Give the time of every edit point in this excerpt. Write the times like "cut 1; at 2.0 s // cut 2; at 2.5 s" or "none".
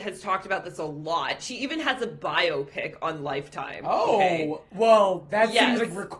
none